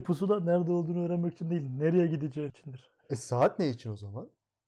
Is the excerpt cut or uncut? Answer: cut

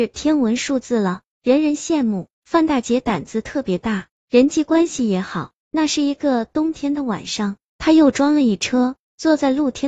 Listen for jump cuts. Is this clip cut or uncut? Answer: cut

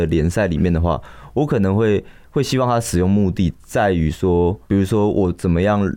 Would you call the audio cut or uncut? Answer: cut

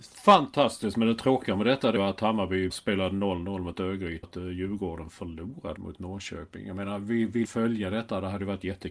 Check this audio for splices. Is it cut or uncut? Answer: cut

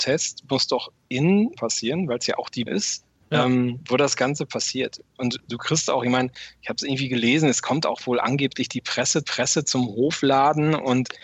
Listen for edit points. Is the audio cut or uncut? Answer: cut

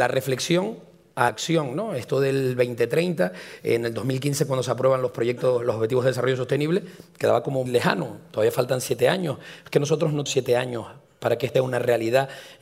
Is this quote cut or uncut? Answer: cut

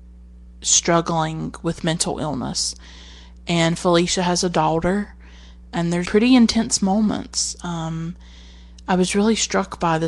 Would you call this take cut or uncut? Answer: cut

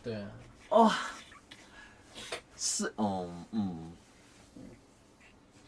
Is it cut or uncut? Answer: cut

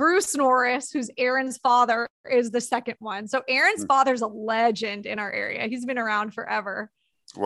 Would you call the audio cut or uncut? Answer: uncut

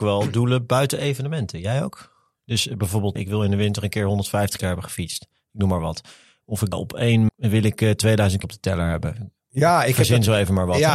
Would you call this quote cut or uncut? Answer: cut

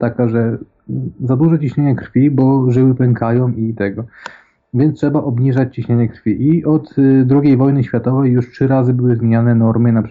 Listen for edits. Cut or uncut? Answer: uncut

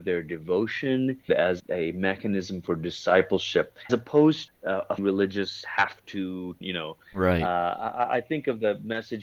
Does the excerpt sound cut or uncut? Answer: cut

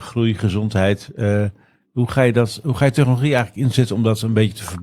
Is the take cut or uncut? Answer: uncut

